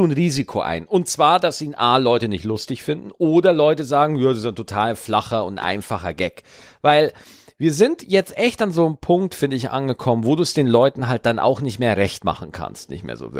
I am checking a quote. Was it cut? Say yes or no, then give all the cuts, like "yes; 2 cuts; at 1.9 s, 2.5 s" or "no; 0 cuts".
no; 0 cuts